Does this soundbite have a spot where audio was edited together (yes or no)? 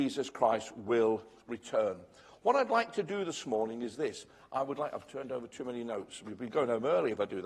no